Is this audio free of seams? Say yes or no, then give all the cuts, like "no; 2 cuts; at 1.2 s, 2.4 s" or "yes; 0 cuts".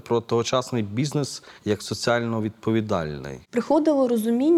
no; 2 cuts; at 1.6 s, 3.4 s